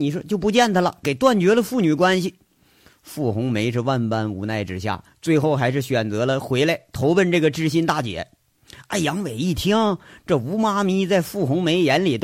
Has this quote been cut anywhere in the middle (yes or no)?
yes